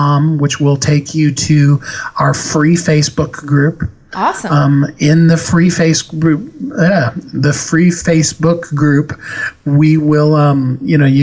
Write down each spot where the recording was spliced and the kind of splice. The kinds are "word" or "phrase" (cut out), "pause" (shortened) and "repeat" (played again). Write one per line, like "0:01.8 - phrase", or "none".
none